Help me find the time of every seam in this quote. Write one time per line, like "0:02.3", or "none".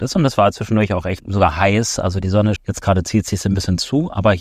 0:01.2
0:02.6